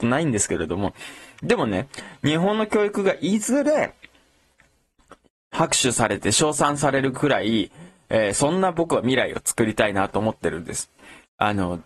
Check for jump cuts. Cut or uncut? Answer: uncut